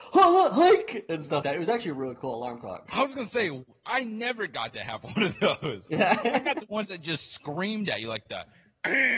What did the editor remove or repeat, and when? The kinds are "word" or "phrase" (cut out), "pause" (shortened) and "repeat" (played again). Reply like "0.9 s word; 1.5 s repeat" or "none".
1.4 s word